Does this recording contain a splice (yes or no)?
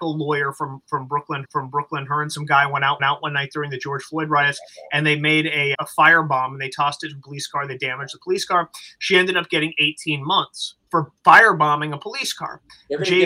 yes